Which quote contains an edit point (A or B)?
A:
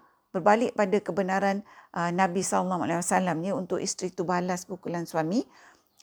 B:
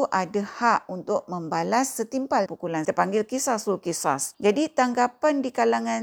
B